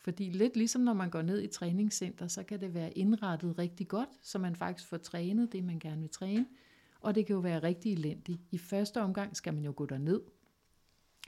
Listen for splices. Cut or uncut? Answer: uncut